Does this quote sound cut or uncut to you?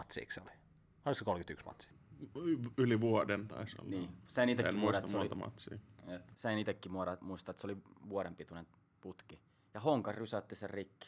uncut